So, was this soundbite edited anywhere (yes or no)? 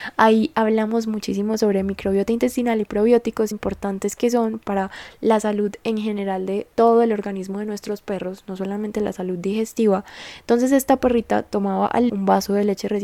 yes